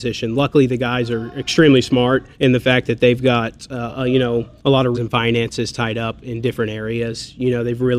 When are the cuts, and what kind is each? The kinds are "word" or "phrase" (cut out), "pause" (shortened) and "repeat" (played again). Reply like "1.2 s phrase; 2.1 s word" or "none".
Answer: 2.3 s pause; 4.6 s pause; 4.9 s word